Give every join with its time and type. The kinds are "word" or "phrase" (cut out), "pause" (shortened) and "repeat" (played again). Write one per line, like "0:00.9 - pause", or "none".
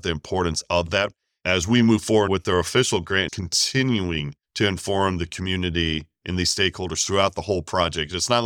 0:02.3 - word
0:03.3 - word
0:04.4 - pause